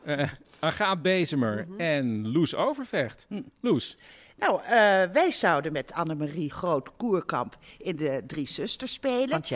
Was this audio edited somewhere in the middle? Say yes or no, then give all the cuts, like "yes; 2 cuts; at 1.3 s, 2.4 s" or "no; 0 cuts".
yes; 1 cut; at 6.5 s